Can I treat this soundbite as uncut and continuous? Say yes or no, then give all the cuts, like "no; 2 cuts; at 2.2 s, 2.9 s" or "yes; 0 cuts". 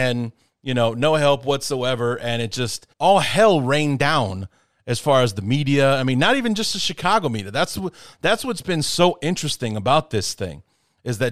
no; 1 cut; at 2.9 s